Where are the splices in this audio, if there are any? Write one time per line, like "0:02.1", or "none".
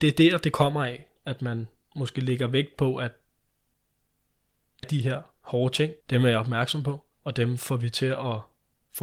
0:01.2
0:04.8
0:06.0
0:07.1